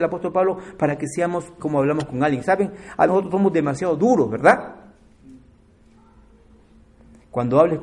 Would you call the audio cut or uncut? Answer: cut